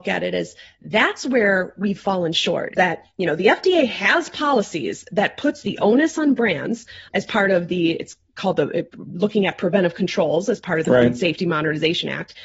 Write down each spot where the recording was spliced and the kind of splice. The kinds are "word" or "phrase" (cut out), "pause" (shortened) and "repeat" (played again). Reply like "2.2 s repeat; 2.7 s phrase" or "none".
2.7 s word; 7.1 s word